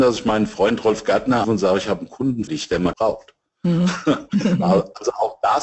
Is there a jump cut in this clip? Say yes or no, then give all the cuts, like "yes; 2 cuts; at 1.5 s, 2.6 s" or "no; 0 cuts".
yes; 3 cuts; at 1.4 s, 2.5 s, 2.9 s